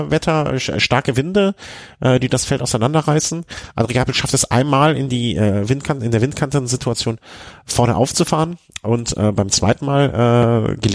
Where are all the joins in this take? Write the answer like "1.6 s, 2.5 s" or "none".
none